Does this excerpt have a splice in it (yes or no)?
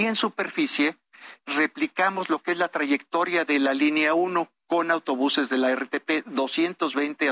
yes